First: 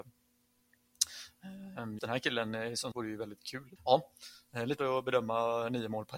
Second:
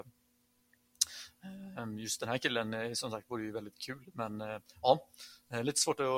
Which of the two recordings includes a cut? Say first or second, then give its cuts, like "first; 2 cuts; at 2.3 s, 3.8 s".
first; 4 cuts; at 2.0 s, 2.9 s, 3.8 s, 4.8 s